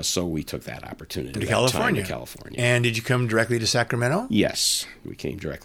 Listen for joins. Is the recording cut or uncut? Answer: cut